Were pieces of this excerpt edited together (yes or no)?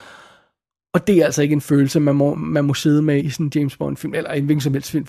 yes